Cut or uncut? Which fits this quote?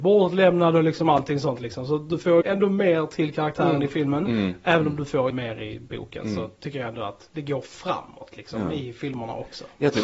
cut